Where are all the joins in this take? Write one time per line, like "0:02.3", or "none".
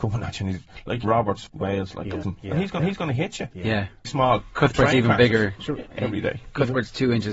0:01.0
0:01.5
0:02.2
0:02.8
0:04.0